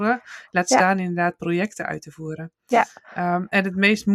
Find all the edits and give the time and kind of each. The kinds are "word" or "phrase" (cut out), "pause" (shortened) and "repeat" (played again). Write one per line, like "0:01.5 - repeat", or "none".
none

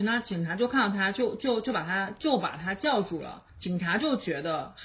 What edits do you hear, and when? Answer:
0:03.5 - pause

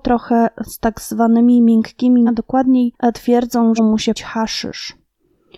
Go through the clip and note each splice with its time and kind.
0:02.3 - word
0:03.8 - phrase
0:04.2 - word

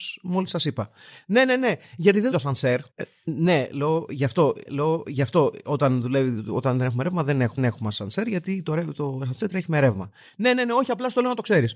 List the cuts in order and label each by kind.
0:02.3 - word
0:02.9 - pause
0:04.7 - repeat
0:07.6 - repeat

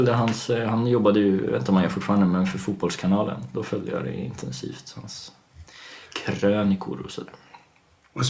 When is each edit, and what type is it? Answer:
none

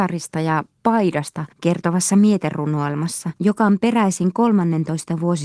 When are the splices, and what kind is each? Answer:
0:01.5 - pause
0:03.4 - pause

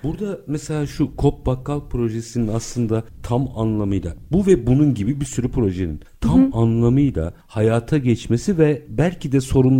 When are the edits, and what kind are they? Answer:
none

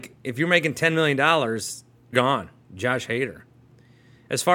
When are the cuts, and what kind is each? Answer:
0:02.1 - word

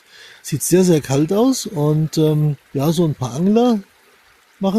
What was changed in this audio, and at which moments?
0:02.6 - pause

